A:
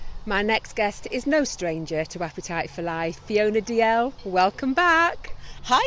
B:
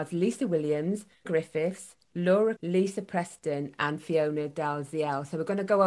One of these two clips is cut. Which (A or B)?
B